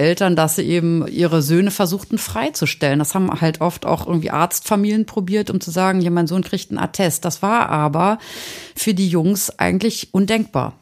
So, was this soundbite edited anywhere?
no; 0 cuts

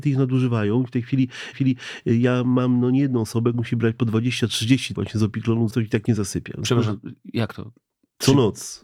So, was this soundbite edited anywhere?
yes; 4 cuts; at 1.5 s, 3.5 s, 4.9 s, 5.7 s

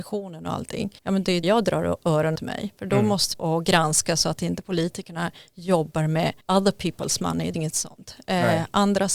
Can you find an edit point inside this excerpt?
yes; 6 cuts; at 1.0 s, 1.4 s, 2.4 s, 3.3 s, 6.4 s, 7.5 s

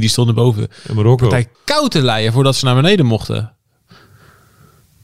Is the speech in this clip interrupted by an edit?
yes; 1 cut; at 1.5 s

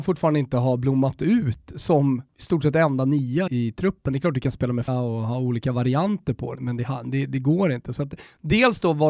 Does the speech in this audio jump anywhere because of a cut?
yes; 5 cuts; at 2.3 s, 3.5 s, 4.9 s, 6.5 s, 7.3 s

